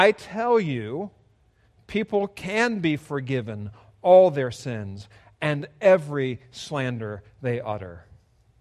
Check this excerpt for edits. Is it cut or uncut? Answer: uncut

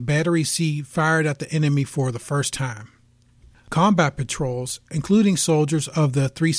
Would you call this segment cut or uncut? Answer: uncut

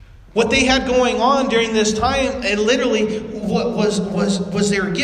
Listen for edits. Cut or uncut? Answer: uncut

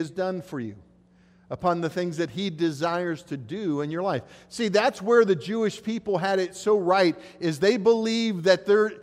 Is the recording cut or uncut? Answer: uncut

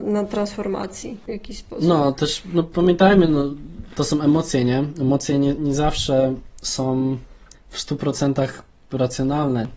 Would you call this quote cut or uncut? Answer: cut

